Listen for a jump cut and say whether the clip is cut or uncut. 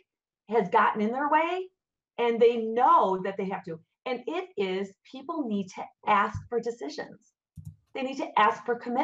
uncut